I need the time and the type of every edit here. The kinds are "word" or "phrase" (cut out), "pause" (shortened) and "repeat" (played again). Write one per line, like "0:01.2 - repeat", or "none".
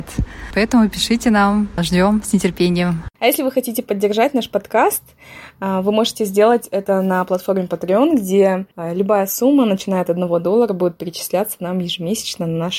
0:03.1 - pause
0:08.7 - pause